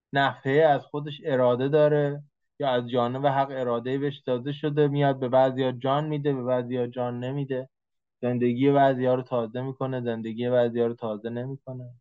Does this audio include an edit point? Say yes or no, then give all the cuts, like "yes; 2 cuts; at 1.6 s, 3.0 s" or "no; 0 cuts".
no; 0 cuts